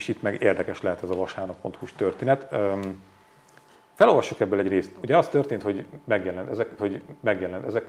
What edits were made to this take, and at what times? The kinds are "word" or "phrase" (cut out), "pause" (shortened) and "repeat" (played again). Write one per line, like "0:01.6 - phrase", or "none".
0:06.8 - repeat